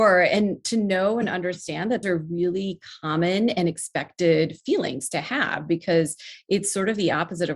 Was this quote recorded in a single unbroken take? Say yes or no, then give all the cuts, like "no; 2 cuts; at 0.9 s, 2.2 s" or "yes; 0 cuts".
no; 1 cut; at 2.0 s